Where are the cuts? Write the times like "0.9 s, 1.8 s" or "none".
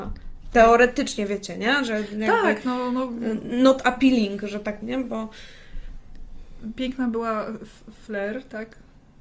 4.8 s